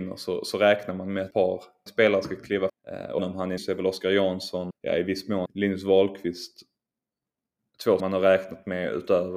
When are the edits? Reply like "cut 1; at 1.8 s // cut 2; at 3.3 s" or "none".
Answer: cut 1; at 1.3 s // cut 2; at 1.9 s // cut 3; at 2.7 s // cut 4; at 3.2 s // cut 5; at 3.6 s // cut 6; at 4.7 s // cut 7; at 5.5 s // cut 8; at 8.0 s